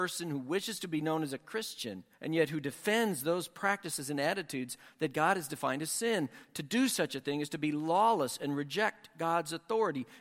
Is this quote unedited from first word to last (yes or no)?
no